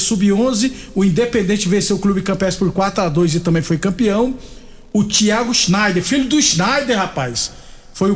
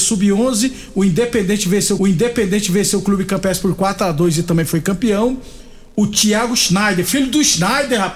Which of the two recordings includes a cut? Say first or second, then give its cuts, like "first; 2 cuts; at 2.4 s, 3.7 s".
second; 1 cut; at 2.0 s